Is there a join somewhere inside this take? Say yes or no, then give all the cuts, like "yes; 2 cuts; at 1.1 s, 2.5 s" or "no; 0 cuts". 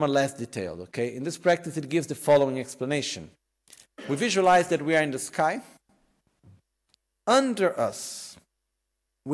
no; 0 cuts